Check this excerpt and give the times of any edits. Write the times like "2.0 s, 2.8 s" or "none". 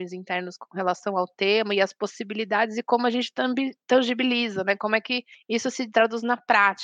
5.9 s